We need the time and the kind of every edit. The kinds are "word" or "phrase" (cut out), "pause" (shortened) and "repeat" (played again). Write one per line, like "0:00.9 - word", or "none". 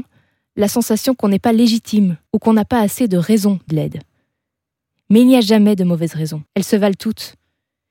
0:02.3 - pause
0:03.7 - phrase
0:06.5 - pause